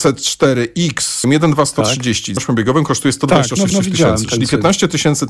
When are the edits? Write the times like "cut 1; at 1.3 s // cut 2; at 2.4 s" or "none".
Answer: cut 1; at 1.2 s // cut 2; at 2.4 s // cut 3; at 3.7 s